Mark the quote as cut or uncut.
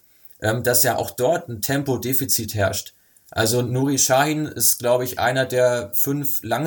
uncut